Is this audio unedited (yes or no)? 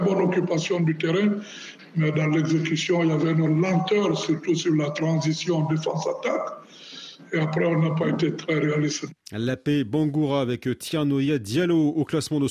yes